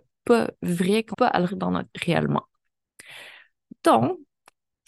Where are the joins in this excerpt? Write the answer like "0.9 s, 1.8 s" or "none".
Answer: 1.1 s, 1.5 s, 1.9 s